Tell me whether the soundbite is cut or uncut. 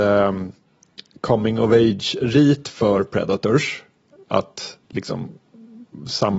cut